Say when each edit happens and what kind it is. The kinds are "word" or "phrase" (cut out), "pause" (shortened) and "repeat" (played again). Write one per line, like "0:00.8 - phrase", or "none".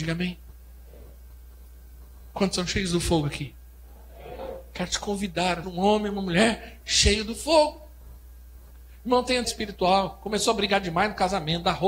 0:05.6 - word
0:09.4 - word